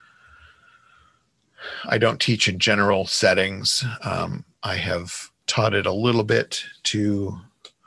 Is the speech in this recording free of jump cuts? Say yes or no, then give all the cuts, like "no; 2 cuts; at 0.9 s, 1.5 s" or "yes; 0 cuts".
no; 2 cuts; at 4.5 s, 5.4 s